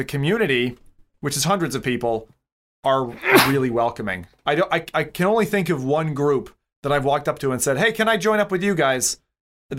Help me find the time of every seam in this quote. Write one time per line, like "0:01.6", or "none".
none